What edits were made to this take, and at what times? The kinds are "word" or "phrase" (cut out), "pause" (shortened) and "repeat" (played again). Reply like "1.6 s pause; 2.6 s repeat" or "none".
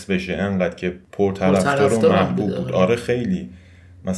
none